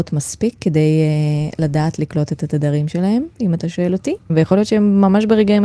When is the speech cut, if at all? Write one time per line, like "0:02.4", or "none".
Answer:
none